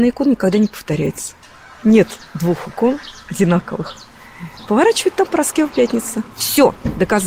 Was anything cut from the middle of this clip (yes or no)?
no